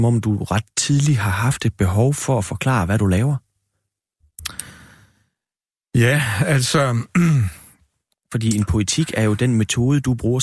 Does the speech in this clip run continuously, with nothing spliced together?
yes; 0 cuts

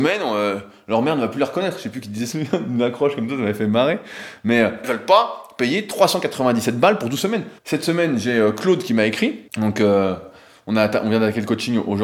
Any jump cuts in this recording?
yes; 4 cuts; at 2.3 s, 4.8 s, 7.6 s, 9.5 s

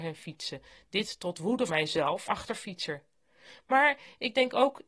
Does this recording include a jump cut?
yes; 2 cuts; at 1.7 s, 2.3 s

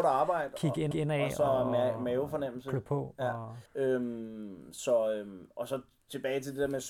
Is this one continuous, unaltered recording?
no; 2 cuts; at 0.9 s, 3.7 s

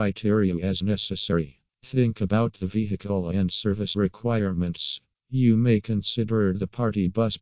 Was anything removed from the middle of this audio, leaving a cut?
no; 0 cuts

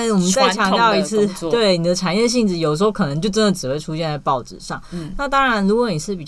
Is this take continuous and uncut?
yes; 0 cuts

